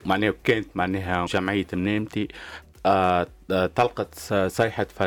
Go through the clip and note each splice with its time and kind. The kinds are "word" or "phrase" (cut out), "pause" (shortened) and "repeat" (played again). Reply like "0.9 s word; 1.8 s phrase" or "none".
1.3 s word